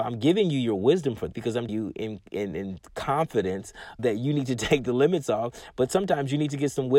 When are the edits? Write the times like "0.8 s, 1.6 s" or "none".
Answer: 1.3 s, 1.7 s, 2.9 s, 4.0 s